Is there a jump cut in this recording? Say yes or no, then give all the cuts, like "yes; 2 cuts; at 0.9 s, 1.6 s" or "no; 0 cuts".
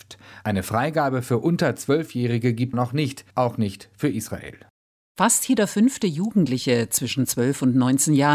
yes; 2 cuts; at 2.7 s, 3.3 s